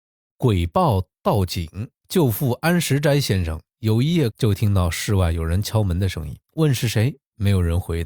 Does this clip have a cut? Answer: yes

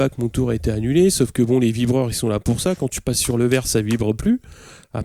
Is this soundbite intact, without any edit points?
yes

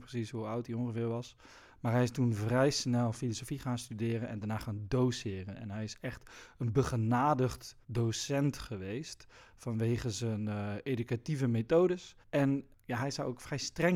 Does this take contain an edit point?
yes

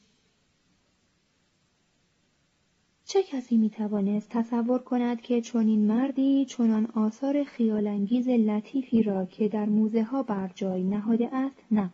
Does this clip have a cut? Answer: no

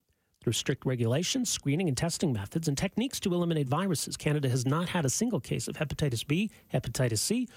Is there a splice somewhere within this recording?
no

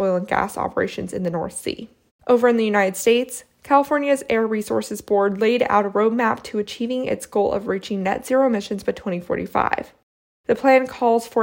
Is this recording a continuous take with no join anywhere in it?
no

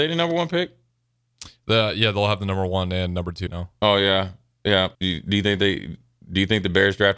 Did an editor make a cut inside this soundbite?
yes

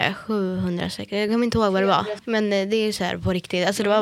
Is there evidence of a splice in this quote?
no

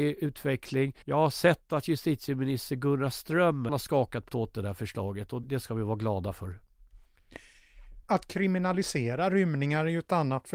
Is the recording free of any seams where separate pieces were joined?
no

